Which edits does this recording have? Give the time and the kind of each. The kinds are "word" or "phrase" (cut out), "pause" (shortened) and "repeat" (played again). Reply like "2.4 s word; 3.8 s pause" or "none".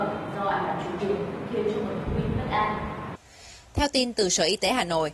1.0 s word